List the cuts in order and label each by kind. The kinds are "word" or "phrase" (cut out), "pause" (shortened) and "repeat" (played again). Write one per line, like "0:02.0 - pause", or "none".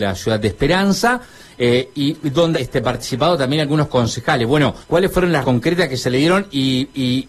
0:02.5 - word
0:04.8 - pause
0:05.4 - word